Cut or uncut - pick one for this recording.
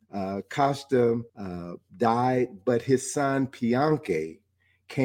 cut